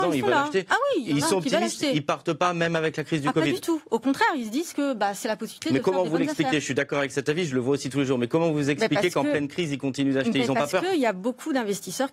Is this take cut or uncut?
uncut